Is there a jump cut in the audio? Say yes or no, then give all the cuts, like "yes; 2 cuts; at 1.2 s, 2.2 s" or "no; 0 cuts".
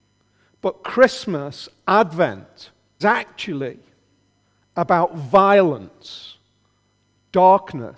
yes; 1 cut; at 3.0 s